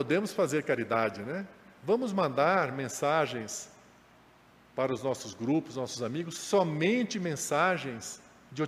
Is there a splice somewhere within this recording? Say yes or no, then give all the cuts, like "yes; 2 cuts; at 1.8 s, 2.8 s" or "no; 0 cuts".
no; 0 cuts